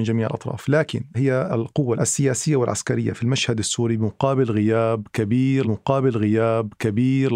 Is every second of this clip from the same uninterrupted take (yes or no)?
no